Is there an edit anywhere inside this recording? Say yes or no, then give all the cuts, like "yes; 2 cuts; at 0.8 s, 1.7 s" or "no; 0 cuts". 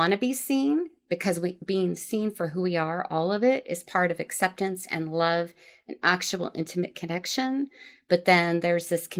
no; 0 cuts